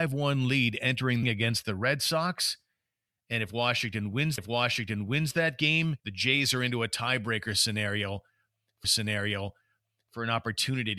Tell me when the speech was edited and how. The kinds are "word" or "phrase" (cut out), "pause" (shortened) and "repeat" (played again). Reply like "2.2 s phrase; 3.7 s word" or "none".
1.2 s phrase; 4.4 s repeat; 6.0 s pause; 8.8 s repeat

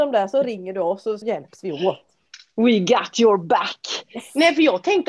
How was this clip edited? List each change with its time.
1.2 s word

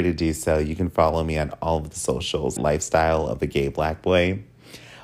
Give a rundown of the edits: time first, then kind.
2.6 s word

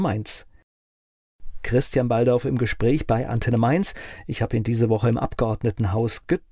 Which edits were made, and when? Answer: none

